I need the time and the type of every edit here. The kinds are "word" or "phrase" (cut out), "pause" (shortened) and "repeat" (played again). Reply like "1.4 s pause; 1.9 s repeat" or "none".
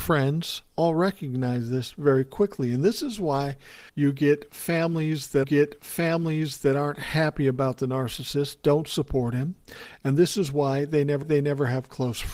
3.9 s pause; 5.4 s repeat; 11.2 s repeat